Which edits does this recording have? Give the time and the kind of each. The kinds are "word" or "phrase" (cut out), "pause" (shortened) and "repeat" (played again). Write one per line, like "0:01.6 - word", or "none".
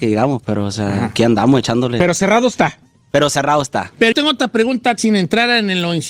0:04.1 - word
0:05.0 - word